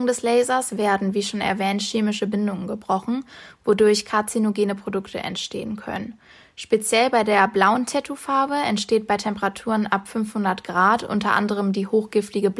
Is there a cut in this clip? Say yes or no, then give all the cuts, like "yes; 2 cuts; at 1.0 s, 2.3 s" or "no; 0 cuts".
no; 0 cuts